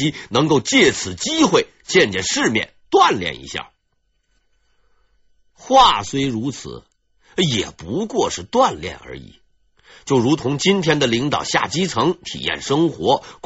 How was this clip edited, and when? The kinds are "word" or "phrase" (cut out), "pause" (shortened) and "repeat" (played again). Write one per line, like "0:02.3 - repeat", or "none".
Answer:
none